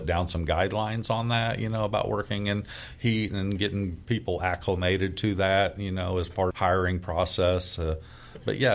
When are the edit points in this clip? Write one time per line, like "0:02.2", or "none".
0:06.5